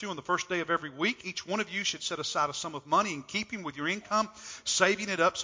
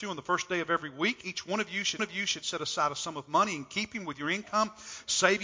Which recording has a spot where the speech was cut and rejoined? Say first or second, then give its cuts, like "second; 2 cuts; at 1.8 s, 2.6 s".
second; 1 cut; at 2.0 s